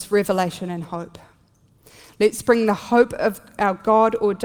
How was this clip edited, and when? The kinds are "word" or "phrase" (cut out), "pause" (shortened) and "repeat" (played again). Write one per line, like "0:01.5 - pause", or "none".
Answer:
none